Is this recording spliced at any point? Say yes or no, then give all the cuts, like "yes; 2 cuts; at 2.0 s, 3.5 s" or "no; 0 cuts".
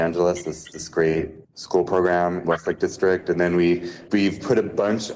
yes; 3 cuts; at 1.4 s, 2.4 s, 4.1 s